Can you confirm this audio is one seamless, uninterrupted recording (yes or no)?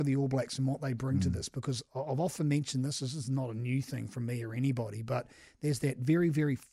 yes